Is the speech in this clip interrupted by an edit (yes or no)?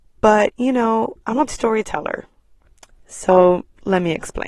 yes